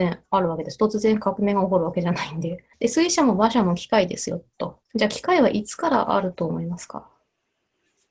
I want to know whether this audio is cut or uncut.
cut